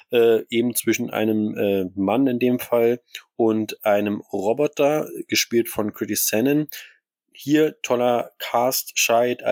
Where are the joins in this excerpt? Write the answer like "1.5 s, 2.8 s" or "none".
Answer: none